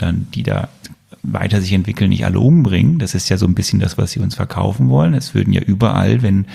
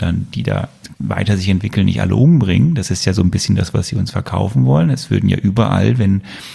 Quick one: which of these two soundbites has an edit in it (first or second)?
second